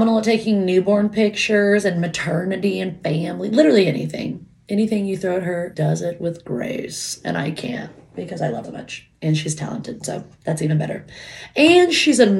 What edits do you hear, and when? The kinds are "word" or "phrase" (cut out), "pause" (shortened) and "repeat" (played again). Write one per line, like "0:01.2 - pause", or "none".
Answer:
0:05.7 - word
0:08.6 - word